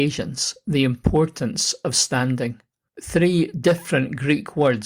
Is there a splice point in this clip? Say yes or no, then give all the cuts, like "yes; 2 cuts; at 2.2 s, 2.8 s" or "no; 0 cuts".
yes; 1 cut; at 2.9 s